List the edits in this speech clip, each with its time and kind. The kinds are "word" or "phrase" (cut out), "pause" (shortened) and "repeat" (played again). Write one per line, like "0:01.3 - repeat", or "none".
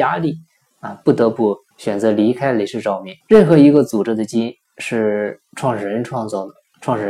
0:01.7 - pause
0:03.2 - pause